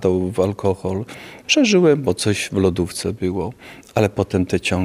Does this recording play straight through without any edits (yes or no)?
yes